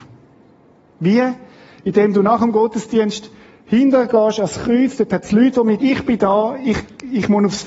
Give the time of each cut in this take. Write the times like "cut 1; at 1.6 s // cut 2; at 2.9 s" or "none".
cut 1; at 5.8 s